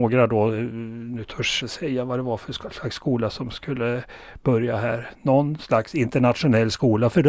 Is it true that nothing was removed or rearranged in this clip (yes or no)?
no